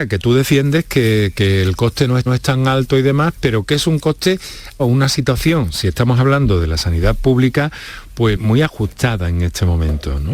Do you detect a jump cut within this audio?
yes; 3 cuts; at 2.3 s, 4.8 s, 8.4 s

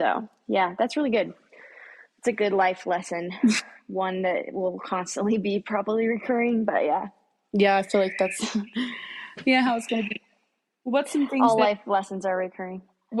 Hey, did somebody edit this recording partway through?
no; 0 cuts

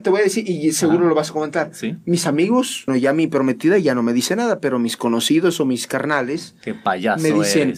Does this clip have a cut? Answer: yes; 1 cut; at 2.9 s

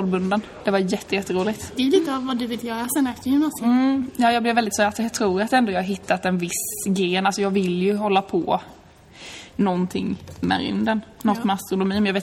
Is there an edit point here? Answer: yes; 2 cuts; at 1.7 s, 4.7 s

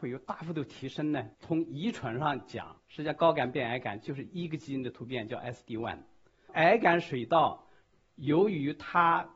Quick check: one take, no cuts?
no; 2 cuts; at 1.3 s, 2.8 s

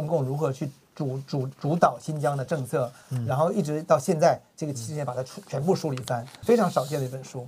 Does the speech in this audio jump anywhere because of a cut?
yes; 1 cut; at 6.4 s

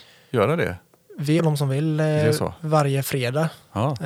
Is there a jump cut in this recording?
yes; 1 cut; at 1.4 s

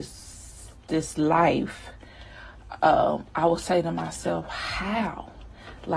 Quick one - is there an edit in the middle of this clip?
no; 0 cuts

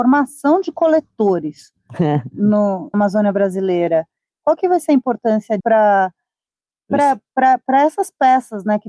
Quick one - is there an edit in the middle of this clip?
yes; 2 cuts; at 2.9 s, 5.6 s

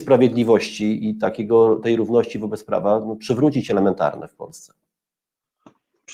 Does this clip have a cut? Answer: no; 0 cuts

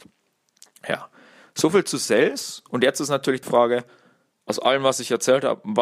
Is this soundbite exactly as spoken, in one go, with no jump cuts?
no; 1 cut; at 3.4 s

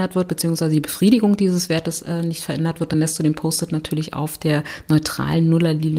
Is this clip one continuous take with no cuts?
yes; 0 cuts

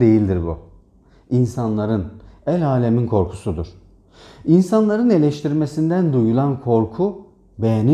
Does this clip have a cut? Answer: no; 0 cuts

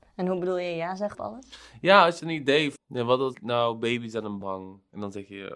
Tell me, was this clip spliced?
yes; 5 cuts; at 1.1 s, 2.2 s, 2.8 s, 3.3 s, 4.4 s

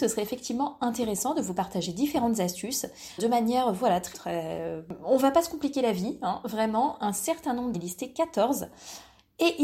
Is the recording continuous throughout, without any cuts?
no; 3 cuts; at 3.2 s, 4.1 s, 7.7 s

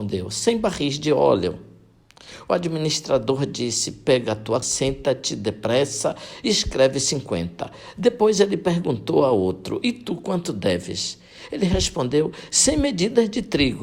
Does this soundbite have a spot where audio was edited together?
yes; 1 cut; at 4.6 s

